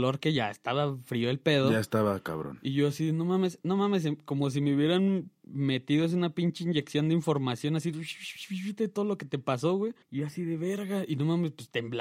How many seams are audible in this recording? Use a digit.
1